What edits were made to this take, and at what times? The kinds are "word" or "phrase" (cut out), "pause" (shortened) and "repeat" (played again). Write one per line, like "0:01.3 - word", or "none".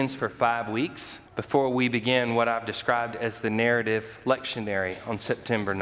0:01.3 - pause